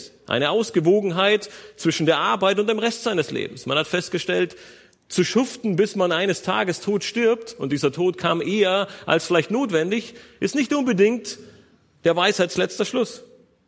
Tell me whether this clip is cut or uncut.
uncut